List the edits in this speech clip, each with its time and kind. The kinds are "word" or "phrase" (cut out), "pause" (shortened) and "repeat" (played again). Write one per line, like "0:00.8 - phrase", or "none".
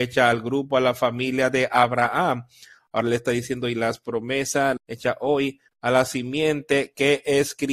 0:04.8 - word